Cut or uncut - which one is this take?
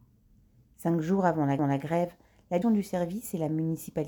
cut